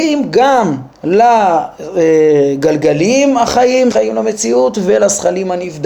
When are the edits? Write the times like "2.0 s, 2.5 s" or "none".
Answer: 0.9 s, 3.9 s

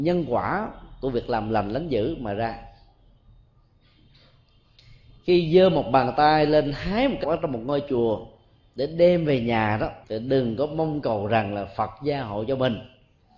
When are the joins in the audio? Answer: 7.2 s, 10.0 s

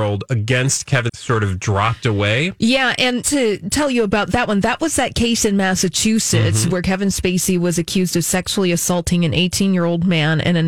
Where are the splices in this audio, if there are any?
1.1 s, 3.2 s

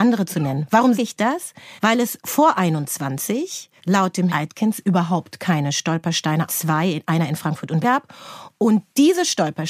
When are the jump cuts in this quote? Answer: 1.0 s, 1.8 s, 3.8 s, 4.3 s, 6.5 s, 7.8 s

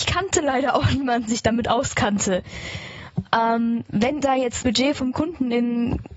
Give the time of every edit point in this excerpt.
1.3 s, 4.2 s, 4.6 s

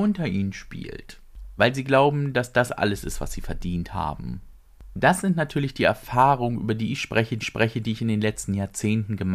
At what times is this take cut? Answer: 7.4 s

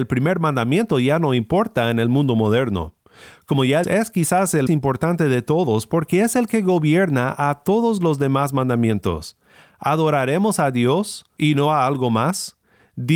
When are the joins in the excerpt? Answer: 3.8 s, 4.7 s

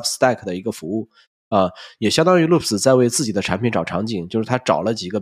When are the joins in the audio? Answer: none

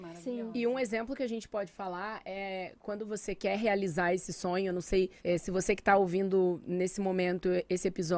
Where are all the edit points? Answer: 5.2 s

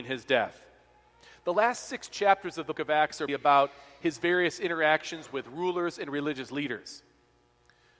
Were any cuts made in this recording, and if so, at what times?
2.7 s, 3.3 s

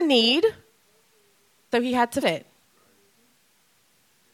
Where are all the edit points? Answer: 1.7 s, 2.2 s

